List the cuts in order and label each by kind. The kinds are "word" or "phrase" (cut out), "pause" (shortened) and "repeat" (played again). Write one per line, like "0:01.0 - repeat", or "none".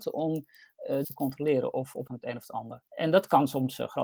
0:01.0 - phrase
0:02.1 - phrase
0:02.9 - pause